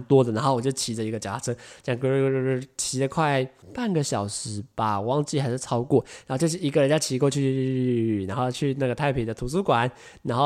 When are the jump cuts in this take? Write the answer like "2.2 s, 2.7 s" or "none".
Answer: 3.6 s